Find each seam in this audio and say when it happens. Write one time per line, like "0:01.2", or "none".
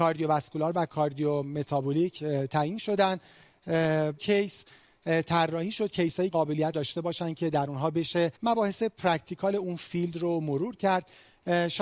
0:04.2
0:06.3
0:06.7
0:08.4